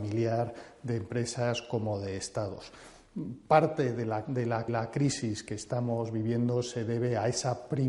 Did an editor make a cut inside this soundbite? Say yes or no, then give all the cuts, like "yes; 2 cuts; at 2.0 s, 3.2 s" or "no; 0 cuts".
yes; 2 cuts; at 4.2 s, 4.7 s